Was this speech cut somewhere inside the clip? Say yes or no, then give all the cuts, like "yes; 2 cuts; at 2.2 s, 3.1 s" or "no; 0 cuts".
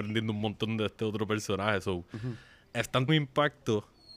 yes; 1 cut; at 3.1 s